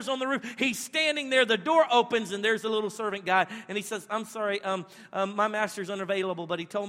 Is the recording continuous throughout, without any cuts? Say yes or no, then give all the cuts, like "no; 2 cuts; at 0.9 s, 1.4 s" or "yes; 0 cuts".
yes; 0 cuts